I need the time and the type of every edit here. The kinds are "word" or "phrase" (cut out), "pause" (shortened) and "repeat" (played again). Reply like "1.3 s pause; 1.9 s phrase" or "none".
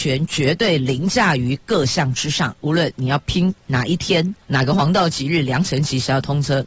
4.4 s pause